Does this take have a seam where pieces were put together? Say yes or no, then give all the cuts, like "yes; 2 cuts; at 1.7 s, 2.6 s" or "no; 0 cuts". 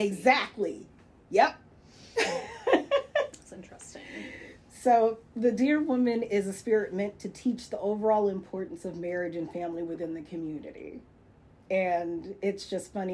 no; 0 cuts